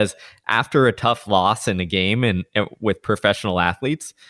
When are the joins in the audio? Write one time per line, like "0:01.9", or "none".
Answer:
none